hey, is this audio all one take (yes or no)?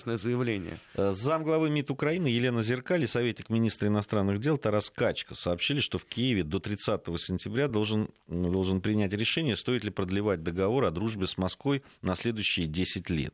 yes